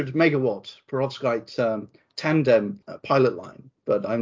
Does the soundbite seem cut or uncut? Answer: uncut